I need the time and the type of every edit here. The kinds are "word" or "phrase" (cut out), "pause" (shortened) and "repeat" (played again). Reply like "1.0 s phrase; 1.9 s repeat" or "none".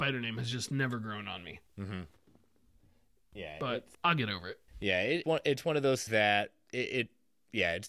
1.7 s pause; 3.9 s pause; 4.7 s pause; 5.2 s word; 6.1 s word